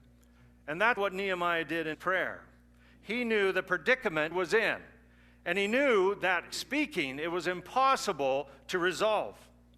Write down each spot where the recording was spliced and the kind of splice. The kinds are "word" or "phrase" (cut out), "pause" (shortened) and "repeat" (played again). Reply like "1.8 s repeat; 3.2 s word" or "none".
1.0 s word; 1.9 s word; 4.3 s word; 6.5 s word